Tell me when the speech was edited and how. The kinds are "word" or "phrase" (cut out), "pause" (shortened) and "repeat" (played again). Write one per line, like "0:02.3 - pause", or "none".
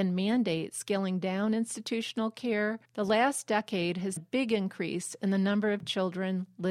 0:02.8 - pause
0:04.2 - word